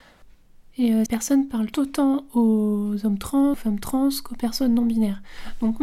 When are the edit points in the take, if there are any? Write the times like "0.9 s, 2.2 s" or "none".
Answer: 1.1 s, 1.7 s, 3.5 s